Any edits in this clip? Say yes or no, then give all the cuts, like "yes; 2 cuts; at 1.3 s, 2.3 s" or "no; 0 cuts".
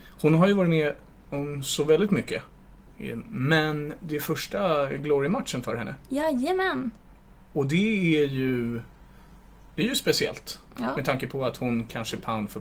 no; 0 cuts